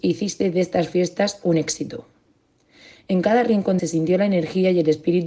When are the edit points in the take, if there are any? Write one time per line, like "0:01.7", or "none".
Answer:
0:03.8

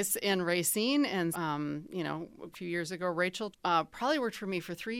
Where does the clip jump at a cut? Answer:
0:01.3
0:02.5
0:03.5

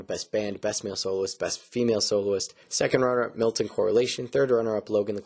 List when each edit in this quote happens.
0:02.6

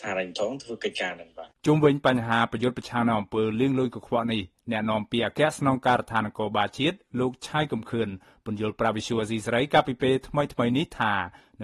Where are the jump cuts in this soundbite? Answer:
none

